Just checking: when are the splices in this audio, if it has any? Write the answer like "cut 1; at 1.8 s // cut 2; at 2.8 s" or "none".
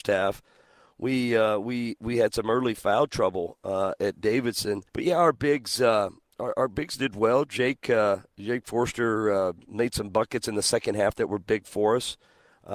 cut 1; at 4.9 s